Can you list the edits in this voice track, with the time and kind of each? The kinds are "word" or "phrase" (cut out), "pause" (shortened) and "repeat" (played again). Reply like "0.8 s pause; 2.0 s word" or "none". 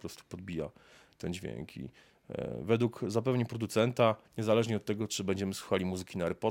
4.3 s pause